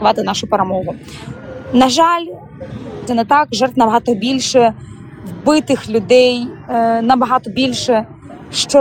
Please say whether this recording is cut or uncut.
cut